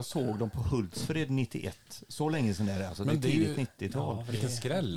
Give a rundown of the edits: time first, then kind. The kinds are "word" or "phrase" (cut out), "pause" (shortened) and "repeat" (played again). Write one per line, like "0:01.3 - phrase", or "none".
none